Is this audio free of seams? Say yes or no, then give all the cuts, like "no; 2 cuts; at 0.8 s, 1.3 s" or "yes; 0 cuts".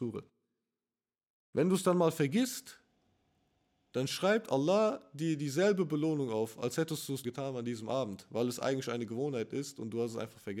no; 1 cut; at 7.2 s